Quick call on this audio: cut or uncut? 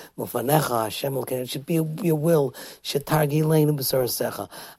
uncut